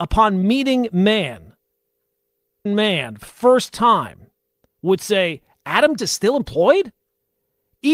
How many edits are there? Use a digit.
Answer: 3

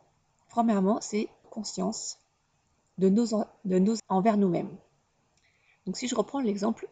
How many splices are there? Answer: 2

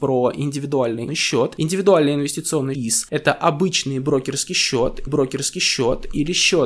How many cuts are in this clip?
3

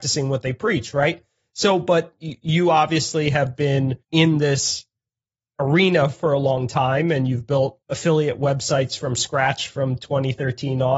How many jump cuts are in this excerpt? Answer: 2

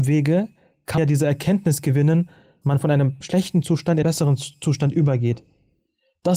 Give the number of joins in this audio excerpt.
4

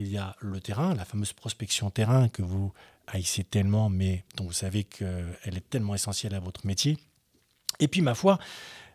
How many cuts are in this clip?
1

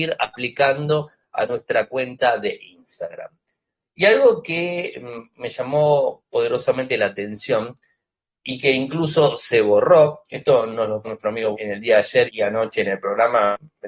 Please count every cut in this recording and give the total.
3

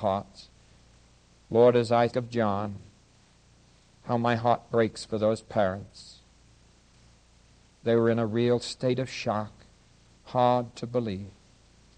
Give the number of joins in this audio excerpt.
1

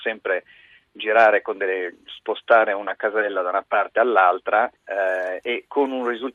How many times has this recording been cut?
1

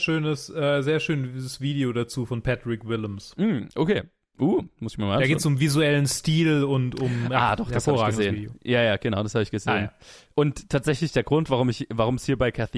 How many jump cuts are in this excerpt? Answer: 0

